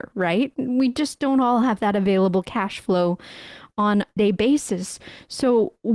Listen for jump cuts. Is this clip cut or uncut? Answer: cut